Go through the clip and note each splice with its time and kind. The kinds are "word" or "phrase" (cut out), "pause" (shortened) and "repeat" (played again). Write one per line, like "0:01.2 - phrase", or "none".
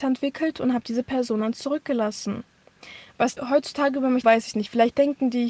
0:03.4 - word
0:04.2 - word